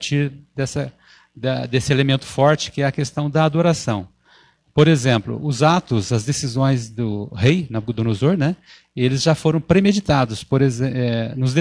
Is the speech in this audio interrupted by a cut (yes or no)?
no